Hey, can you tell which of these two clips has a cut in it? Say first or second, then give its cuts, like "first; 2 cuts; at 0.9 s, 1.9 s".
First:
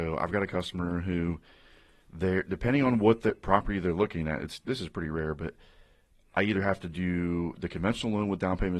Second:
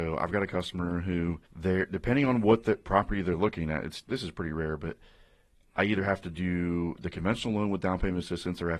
second; 1 cut; at 1.5 s